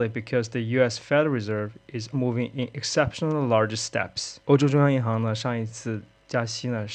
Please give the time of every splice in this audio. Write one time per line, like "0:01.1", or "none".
0:02.1
0:04.4